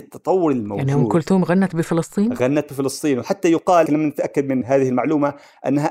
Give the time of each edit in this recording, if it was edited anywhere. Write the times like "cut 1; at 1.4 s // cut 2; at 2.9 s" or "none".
cut 1; at 3.9 s